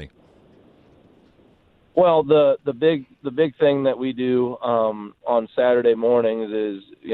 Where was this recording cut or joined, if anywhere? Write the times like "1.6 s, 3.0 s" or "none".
none